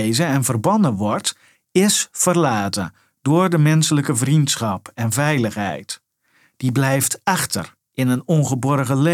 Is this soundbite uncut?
yes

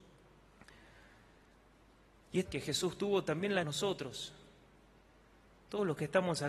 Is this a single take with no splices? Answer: no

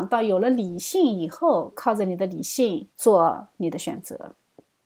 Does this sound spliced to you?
yes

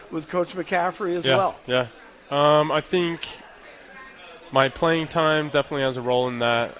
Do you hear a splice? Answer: no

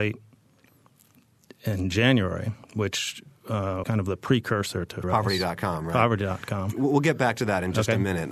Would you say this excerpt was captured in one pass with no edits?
no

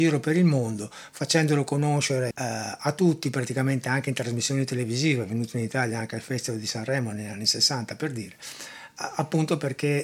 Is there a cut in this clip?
yes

